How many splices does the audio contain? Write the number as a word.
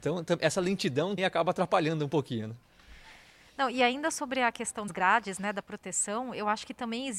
two